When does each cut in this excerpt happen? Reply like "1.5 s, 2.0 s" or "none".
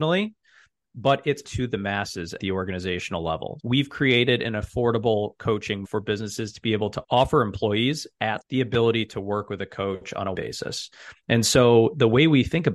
1.4 s, 2.4 s, 3.6 s, 5.8 s, 7.0 s, 8.4 s, 10.3 s